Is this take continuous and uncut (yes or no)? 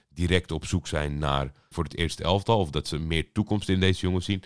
no